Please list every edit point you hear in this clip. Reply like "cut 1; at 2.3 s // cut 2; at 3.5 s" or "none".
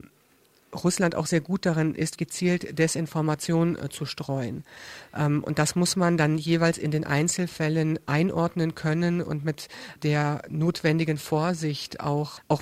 cut 1; at 2.2 s